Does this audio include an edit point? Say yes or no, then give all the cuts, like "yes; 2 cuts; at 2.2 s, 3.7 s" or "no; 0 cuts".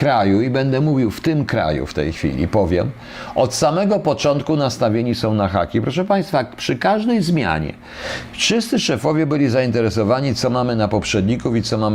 no; 0 cuts